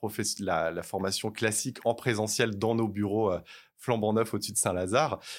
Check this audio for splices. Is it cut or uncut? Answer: uncut